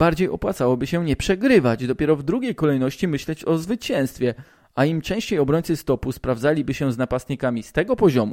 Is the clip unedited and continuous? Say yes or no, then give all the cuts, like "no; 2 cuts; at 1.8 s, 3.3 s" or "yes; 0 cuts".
yes; 0 cuts